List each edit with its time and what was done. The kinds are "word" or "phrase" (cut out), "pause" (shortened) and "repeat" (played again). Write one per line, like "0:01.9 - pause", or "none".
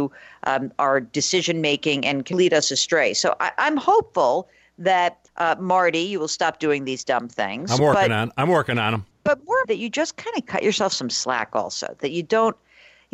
0:02.3 - word
0:05.3 - pause
0:09.1 - pause
0:09.6 - word

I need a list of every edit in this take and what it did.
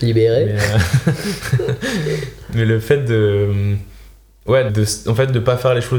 0:04.7 - word

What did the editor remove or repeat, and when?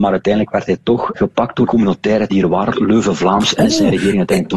0:01.1 - word
0:01.7 - word
0:02.3 - word
0:02.8 - word

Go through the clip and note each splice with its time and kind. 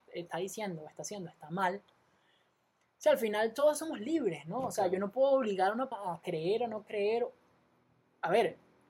0:05.9 - word

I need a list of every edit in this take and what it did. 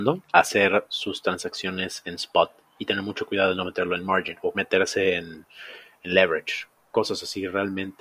0:04.5 - word

